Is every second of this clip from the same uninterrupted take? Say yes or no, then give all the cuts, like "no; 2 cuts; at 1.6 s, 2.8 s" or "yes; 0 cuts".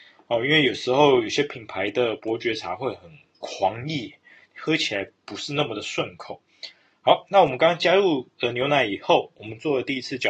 yes; 0 cuts